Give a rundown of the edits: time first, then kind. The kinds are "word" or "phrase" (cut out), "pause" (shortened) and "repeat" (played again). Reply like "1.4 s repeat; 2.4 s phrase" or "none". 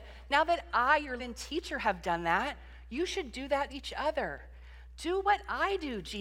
1.2 s word; 3.7 s word